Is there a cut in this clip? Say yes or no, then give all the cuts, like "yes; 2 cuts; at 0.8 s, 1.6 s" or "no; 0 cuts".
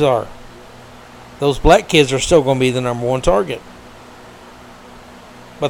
no; 0 cuts